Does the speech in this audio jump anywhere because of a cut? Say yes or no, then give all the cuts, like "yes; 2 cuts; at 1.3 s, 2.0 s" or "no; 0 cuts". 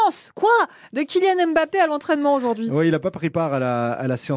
no; 0 cuts